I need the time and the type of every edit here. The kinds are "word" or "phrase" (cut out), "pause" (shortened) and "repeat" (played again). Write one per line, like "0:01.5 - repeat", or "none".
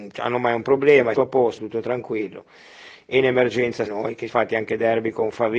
0:01.1 - phrase
0:01.6 - word
0:03.9 - word
0:04.3 - word